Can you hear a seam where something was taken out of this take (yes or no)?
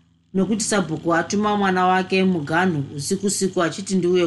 no